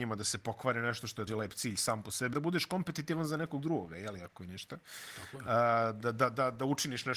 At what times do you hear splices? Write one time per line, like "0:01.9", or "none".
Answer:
0:01.3
0:02.3